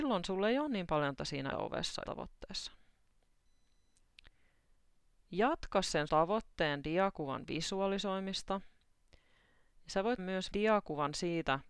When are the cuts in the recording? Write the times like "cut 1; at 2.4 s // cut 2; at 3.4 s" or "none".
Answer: cut 1; at 1.2 s // cut 2; at 1.5 s // cut 3; at 2.0 s // cut 4; at 6.1 s // cut 5; at 10.2 s // cut 6; at 10.5 s